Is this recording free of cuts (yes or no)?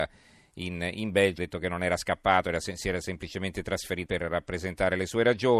no